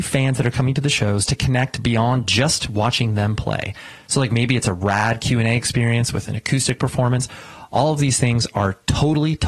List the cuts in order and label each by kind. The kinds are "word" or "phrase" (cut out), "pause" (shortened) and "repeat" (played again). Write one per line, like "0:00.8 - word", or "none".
none